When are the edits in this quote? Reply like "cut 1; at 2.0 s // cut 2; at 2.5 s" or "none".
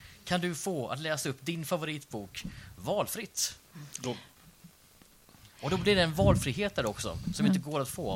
none